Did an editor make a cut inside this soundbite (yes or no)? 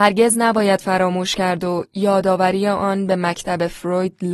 no